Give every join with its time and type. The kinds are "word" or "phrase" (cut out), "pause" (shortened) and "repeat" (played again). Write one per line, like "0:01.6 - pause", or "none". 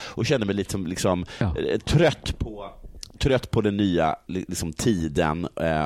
0:04.3 - word